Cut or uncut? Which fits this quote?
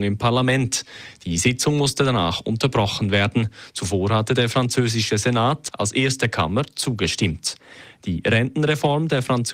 uncut